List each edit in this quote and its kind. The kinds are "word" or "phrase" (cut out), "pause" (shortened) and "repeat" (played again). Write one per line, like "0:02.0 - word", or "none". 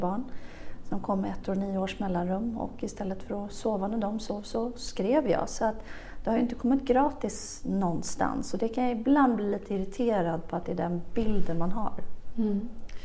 none